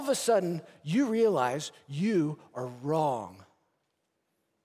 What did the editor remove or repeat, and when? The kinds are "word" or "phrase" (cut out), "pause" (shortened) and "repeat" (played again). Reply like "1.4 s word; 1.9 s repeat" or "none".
none